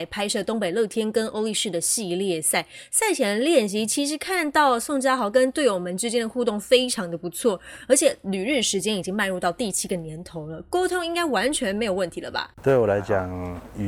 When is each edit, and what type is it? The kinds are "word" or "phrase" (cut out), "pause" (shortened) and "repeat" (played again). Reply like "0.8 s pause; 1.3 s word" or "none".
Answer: 12.5 s pause